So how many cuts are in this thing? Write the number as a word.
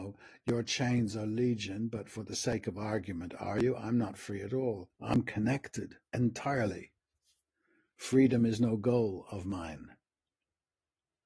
two